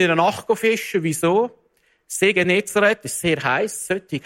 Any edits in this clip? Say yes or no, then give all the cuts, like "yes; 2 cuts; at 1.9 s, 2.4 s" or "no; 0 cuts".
no; 0 cuts